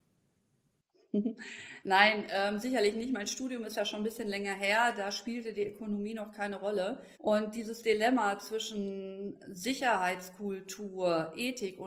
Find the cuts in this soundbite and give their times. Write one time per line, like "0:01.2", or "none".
0:07.1